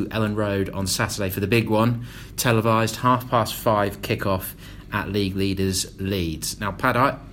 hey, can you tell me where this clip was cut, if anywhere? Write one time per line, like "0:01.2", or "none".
none